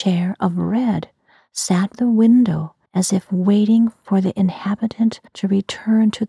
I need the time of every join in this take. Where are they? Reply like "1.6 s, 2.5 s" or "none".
1.9 s, 2.9 s, 5.3 s